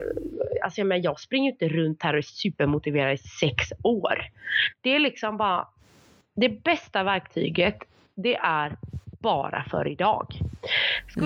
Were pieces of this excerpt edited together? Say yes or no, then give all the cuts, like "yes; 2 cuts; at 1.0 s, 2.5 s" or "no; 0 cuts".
no; 0 cuts